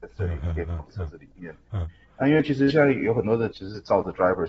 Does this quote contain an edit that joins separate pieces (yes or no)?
yes